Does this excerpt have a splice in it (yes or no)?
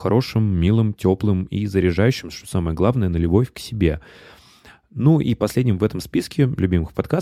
no